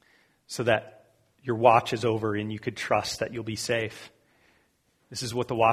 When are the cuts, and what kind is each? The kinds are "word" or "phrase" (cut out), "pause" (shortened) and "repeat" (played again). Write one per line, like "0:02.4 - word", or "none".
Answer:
none